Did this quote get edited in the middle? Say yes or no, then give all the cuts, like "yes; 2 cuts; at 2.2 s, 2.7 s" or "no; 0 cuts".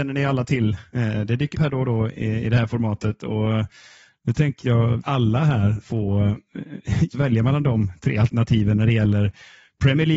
yes; 4 cuts; at 1.5 s, 5.0 s, 5.8 s, 7.1 s